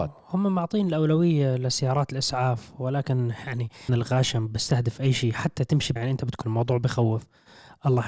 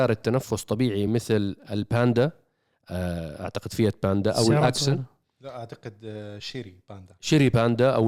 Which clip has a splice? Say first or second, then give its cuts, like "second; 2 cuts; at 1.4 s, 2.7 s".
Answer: first; 4 cuts; at 3.9 s, 5.6 s, 6.0 s, 6.4 s